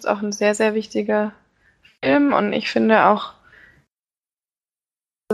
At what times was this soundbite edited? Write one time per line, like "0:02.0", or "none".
none